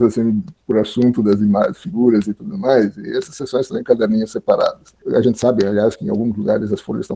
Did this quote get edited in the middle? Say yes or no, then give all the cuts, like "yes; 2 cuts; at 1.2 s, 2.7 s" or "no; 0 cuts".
no; 0 cuts